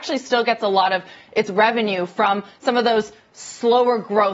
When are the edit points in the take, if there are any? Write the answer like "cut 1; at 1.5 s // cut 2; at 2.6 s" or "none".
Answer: none

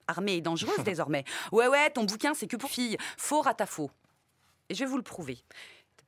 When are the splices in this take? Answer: cut 1; at 2.6 s

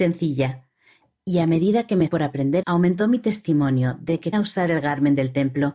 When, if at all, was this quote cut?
cut 1; at 2.1 s // cut 2; at 2.6 s // cut 3; at 4.3 s

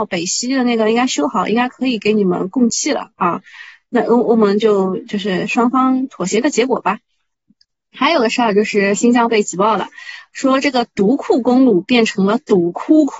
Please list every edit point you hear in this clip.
none

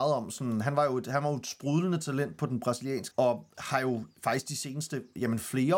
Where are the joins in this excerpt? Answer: cut 1; at 3.1 s

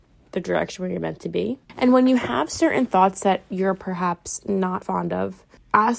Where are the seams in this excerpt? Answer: cut 1; at 1.6 s

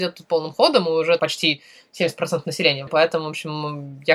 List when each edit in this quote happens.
cut 1; at 1.2 s // cut 2; at 2.9 s

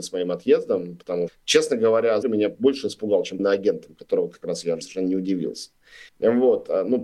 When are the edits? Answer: cut 1; at 1.3 s // cut 2; at 2.2 s // cut 3; at 3.4 s // cut 4; at 4.8 s // cut 5; at 6.1 s

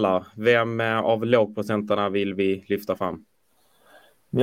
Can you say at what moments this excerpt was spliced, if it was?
none

